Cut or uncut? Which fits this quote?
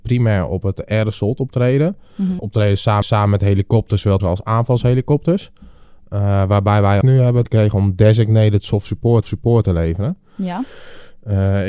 cut